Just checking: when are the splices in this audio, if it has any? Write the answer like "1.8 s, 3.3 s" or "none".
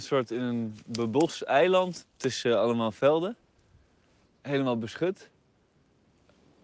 2.0 s